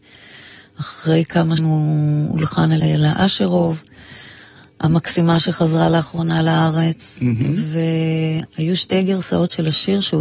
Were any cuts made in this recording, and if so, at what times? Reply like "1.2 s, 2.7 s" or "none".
1.6 s, 2.8 s